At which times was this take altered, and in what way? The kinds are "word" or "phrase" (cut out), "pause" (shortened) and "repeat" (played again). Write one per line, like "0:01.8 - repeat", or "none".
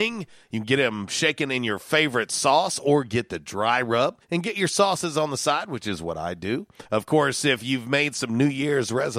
0:04.2 - pause
0:06.8 - pause